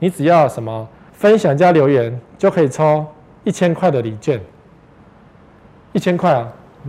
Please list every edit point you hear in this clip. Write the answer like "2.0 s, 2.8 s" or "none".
1.1 s